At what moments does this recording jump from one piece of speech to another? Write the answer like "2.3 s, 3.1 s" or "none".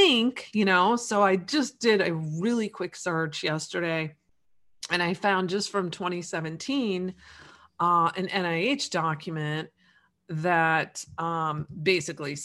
none